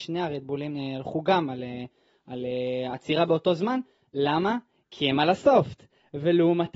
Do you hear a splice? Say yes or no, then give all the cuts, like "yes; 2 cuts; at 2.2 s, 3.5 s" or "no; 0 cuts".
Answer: no; 0 cuts